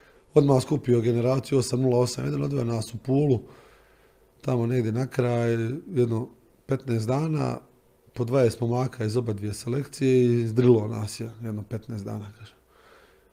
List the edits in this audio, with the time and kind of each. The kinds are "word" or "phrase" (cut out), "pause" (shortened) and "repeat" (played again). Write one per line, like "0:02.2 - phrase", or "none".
none